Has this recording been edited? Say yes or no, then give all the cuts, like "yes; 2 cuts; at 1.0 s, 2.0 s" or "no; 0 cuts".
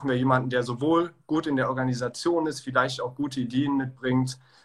no; 0 cuts